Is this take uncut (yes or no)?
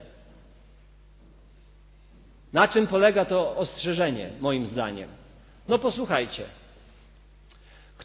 yes